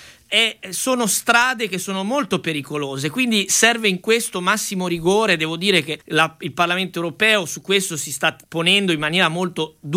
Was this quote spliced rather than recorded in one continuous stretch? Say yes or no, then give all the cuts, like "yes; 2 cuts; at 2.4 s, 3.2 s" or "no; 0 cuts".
yes; 2 cuts; at 6.0 s, 8.4 s